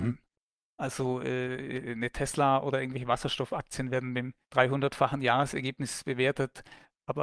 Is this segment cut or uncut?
cut